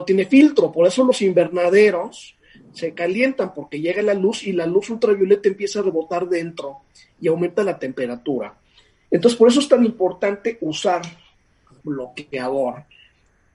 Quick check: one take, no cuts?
yes; 0 cuts

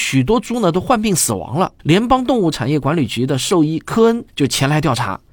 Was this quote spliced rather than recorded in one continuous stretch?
yes; 1 cut; at 1.8 s

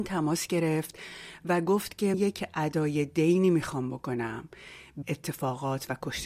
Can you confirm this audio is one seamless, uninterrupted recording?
no; 2 cuts; at 2.1 s, 5.0 s

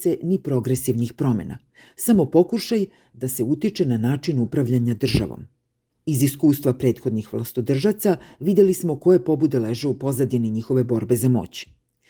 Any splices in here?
no; 0 cuts

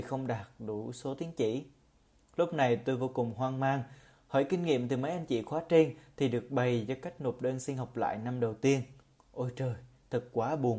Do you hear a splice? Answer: no; 0 cuts

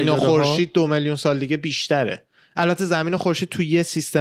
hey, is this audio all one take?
yes; 0 cuts

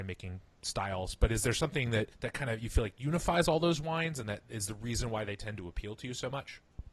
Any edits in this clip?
yes; 1 cut; at 2.1 s

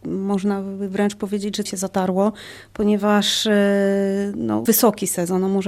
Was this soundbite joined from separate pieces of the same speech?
yes; 2 cuts; at 1.7 s, 4.7 s

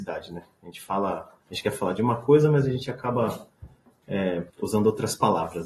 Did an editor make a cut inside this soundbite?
yes; 2 cuts; at 1.4 s, 4.5 s

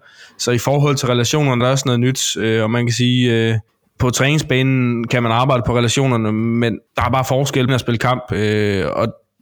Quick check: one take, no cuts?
no; 4 cuts; at 1.6 s, 3.7 s, 6.9 s, 7.7 s

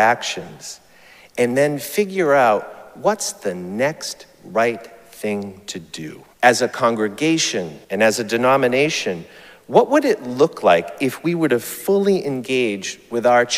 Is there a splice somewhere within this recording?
yes; 2 cuts; at 6.3 s, 7.8 s

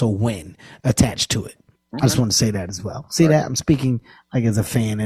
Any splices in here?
no; 0 cuts

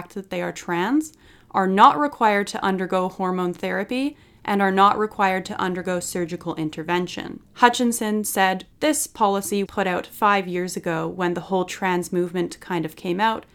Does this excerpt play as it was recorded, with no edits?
no; 3 cuts; at 7.4 s, 8.7 s, 9.7 s

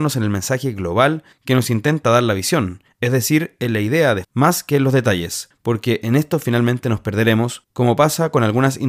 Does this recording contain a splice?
yes; 1 cut; at 4.2 s

